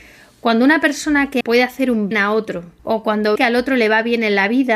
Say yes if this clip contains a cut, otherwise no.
yes